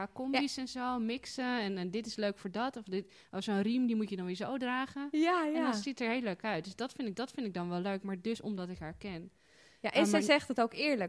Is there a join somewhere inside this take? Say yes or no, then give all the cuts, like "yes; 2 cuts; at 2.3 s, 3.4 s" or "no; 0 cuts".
yes; 1 cut; at 7.1 s